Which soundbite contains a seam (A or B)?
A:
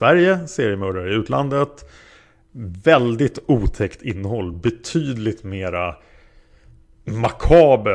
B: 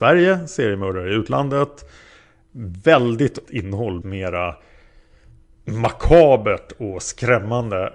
B